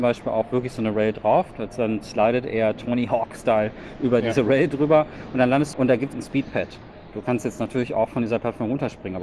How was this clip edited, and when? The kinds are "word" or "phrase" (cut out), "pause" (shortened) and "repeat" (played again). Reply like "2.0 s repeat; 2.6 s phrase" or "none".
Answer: 5.7 s phrase; 6.1 s word